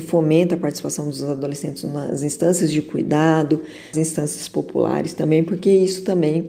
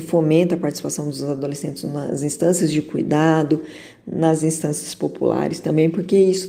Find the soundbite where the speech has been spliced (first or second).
first